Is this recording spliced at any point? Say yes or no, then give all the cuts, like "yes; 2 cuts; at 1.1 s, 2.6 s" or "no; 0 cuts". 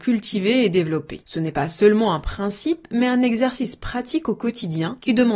no; 0 cuts